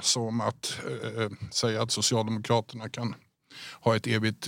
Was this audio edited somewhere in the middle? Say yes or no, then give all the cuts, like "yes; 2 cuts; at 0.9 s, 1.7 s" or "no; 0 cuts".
no; 0 cuts